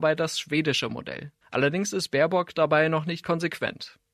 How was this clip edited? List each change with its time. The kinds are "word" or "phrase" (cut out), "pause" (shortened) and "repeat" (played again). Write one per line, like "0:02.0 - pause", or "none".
0:01.4 - pause
0:03.2 - word